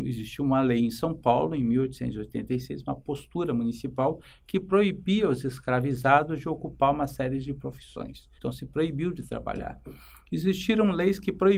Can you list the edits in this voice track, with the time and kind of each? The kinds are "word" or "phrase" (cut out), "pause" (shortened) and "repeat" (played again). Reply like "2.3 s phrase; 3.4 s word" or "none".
8.4 s pause